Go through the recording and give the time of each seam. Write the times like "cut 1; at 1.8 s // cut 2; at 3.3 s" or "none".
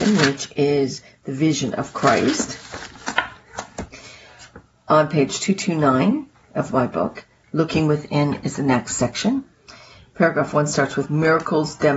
none